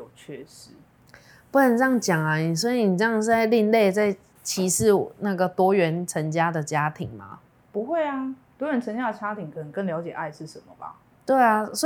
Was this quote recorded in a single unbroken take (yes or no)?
yes